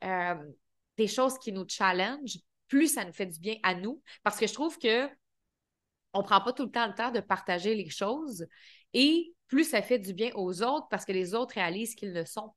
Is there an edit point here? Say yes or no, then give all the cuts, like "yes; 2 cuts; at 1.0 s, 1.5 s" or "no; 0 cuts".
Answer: no; 0 cuts